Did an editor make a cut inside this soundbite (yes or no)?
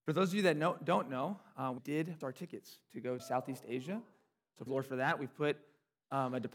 yes